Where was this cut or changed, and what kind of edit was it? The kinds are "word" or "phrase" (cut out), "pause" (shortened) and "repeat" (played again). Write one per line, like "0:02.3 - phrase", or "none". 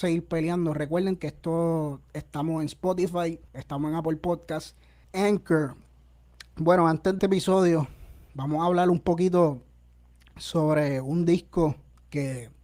0:01.2 - word
0:03.5 - pause
0:05.0 - phrase
0:07.2 - phrase